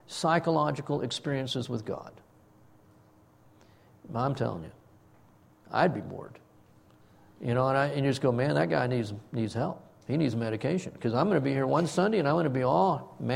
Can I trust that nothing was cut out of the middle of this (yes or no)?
yes